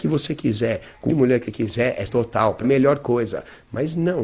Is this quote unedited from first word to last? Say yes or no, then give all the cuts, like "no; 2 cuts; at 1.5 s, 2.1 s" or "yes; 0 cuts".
no; 4 cuts; at 1.1 s, 1.5 s, 2.1 s, 2.6 s